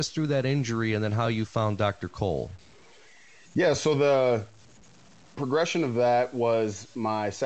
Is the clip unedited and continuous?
yes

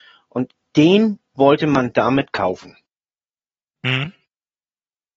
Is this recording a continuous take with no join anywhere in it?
yes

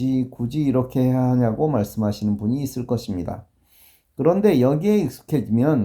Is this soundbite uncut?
yes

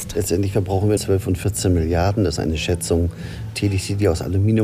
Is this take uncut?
no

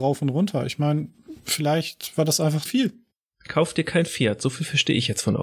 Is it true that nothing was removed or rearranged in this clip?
no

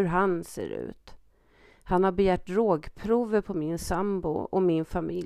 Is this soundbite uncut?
yes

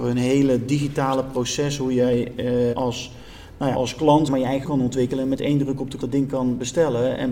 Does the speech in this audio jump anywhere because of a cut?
yes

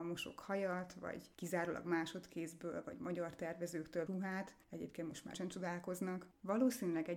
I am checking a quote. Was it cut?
yes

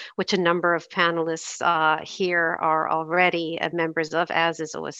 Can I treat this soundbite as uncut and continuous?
yes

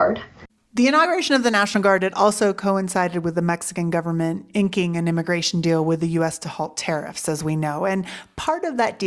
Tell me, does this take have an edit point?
no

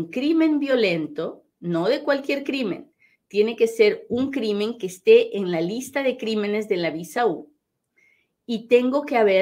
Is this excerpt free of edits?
yes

